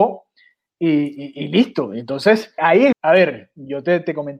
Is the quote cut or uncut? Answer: cut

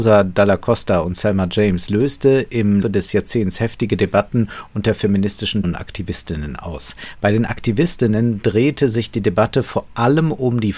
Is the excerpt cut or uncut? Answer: cut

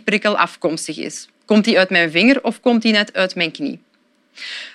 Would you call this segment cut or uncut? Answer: uncut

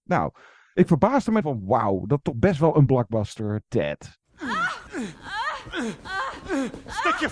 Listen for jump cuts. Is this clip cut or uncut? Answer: cut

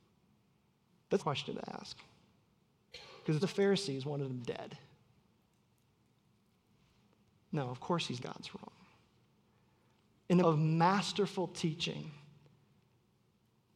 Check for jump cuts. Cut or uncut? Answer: cut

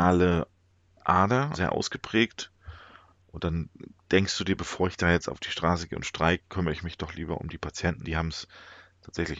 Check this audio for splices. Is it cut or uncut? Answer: cut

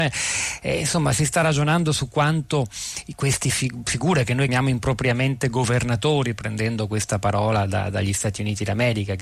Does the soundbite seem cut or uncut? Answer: cut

